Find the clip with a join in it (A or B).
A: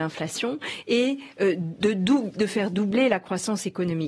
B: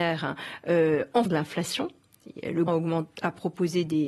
B